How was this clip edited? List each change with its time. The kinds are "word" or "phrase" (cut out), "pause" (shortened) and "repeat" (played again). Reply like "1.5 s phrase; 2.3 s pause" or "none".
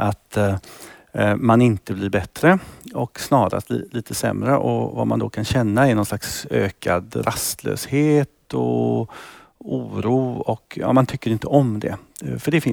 none